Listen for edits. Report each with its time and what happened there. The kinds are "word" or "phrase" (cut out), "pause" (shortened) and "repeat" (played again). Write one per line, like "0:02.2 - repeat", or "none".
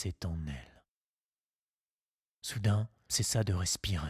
0:03.1 - word